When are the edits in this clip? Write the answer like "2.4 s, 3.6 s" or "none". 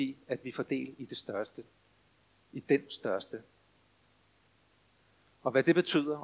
none